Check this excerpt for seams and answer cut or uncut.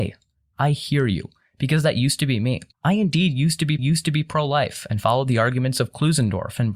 cut